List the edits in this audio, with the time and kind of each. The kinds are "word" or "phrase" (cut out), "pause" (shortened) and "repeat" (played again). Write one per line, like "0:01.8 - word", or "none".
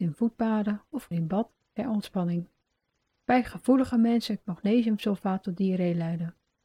0:01.1 - word
0:04.4 - phrase